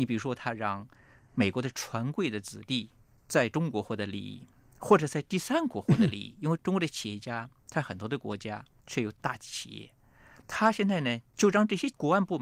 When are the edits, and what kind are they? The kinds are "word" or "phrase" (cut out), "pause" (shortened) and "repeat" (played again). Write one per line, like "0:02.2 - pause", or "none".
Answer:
none

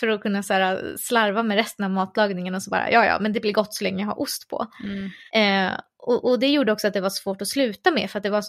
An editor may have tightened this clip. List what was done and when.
0:05.3 - pause

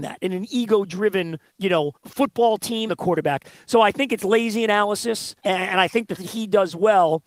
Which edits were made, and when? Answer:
0:01.5 - pause
0:01.9 - pause
0:02.9 - word
0:05.4 - pause
0:06.2 - word

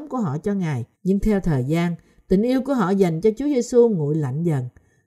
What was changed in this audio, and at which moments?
0:00.9 - pause

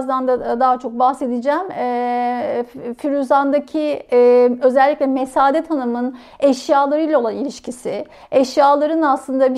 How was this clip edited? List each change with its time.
none

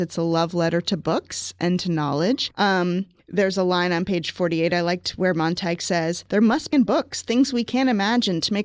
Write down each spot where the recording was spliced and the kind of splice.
0:06.7 - word

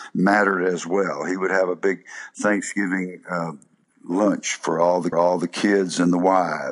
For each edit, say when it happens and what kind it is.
0:05.1 - repeat

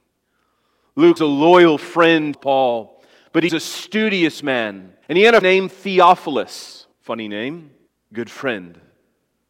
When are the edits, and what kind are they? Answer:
0:01.2 - word
0:02.3 - phrase
0:03.5 - word
0:05.0 - pause
0:05.4 - word
0:06.9 - pause
0:07.9 - pause

